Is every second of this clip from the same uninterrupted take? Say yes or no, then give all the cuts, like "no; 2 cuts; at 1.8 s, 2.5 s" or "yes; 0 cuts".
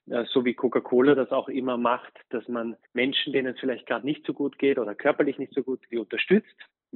no; 2 cuts; at 2.8 s, 5.9 s